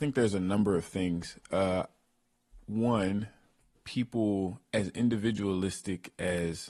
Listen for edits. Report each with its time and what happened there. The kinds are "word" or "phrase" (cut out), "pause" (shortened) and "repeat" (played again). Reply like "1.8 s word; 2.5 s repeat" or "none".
none